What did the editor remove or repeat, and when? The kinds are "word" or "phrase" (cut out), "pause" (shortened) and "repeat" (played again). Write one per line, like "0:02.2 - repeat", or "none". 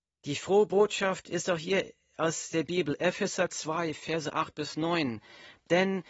0:03.5 - word